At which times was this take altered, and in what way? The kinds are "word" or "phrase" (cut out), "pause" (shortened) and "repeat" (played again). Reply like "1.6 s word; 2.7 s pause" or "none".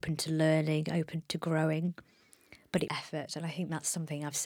2.9 s word